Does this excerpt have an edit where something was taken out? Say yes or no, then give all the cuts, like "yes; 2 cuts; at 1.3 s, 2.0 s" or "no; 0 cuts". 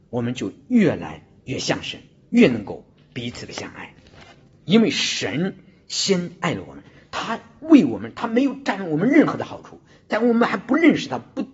no; 0 cuts